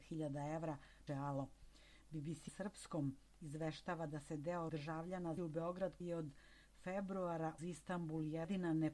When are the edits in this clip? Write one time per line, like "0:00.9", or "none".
0:01.1
0:02.5
0:04.7
0:05.4
0:06.0
0:07.6